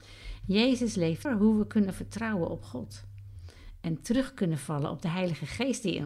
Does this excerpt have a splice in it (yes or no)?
yes